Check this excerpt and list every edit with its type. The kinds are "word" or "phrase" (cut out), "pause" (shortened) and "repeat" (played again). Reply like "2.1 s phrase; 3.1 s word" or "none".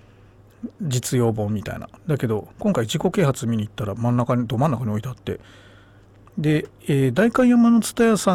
2.0 s pause; 2.5 s pause; 6.8 s pause